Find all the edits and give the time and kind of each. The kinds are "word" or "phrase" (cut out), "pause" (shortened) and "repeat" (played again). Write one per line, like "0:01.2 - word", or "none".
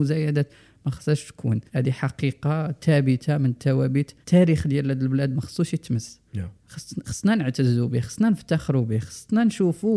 0:01.7 - pause
0:04.2 - pause
0:06.3 - pause